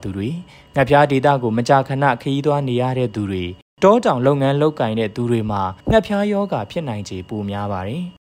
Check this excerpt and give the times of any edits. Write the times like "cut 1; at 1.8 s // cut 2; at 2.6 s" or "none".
cut 1; at 5.8 s